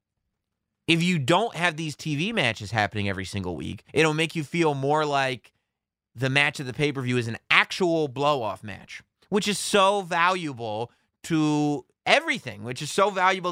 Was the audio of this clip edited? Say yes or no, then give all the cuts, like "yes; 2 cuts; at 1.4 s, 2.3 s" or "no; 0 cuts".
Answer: yes; 1 cut; at 3.9 s